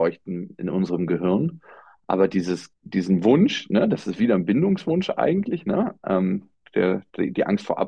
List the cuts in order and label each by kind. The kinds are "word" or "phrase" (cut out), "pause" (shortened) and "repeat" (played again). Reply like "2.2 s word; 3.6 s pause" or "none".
2.8 s pause